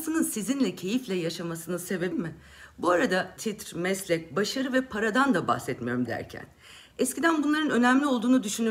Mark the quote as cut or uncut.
cut